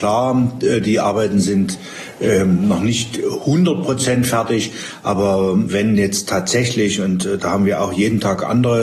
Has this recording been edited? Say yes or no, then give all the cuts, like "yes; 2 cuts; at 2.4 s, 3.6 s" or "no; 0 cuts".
no; 0 cuts